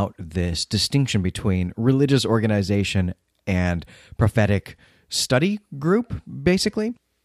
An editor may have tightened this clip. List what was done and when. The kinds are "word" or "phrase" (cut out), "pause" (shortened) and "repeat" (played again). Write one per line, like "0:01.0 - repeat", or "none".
none